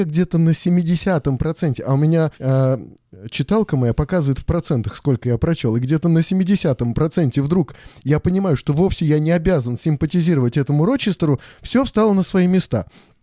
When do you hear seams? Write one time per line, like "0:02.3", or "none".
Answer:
0:02.3